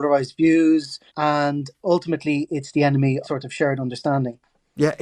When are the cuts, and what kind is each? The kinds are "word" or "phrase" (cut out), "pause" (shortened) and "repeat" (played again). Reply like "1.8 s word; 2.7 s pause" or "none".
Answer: 1.1 s pause; 3.2 s phrase